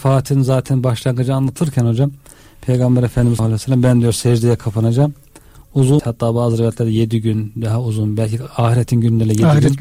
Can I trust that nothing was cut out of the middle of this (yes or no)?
no